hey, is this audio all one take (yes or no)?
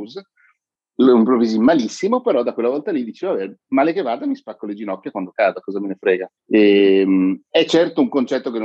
no